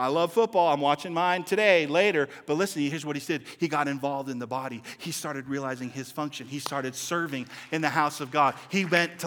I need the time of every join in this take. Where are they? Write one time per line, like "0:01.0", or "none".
none